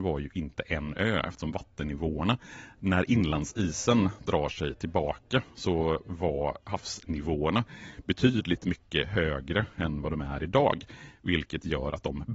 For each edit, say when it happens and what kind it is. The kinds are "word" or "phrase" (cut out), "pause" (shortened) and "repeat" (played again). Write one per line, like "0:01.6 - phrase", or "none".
none